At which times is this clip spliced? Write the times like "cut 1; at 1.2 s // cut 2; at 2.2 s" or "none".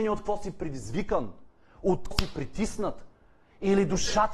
cut 1; at 2.1 s